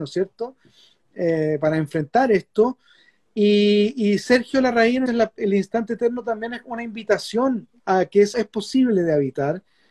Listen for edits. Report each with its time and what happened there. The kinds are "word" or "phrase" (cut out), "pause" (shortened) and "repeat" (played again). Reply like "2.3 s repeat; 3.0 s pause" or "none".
5.1 s word; 8.3 s word